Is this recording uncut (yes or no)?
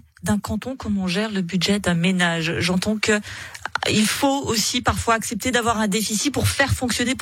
yes